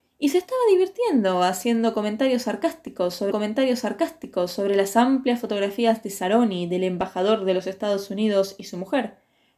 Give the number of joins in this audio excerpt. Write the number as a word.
one